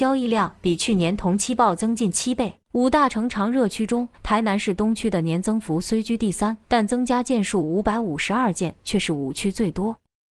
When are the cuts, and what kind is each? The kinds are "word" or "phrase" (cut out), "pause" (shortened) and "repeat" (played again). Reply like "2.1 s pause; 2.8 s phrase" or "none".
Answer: 2.6 s pause; 4.1 s pause; 6.6 s pause